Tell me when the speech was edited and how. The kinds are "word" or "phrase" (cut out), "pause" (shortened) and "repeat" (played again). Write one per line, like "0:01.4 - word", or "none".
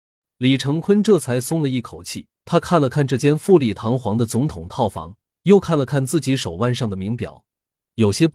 0:02.4 - pause
0:05.3 - pause